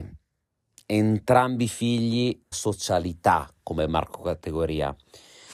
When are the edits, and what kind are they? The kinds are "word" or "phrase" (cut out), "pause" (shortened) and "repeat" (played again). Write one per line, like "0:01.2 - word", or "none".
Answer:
0:02.5 - word